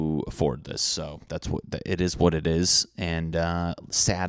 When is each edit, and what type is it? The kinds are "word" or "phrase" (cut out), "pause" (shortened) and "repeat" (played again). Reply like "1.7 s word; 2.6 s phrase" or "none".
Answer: none